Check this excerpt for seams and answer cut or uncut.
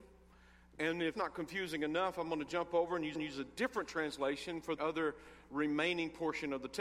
cut